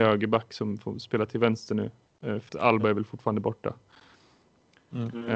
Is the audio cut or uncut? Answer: cut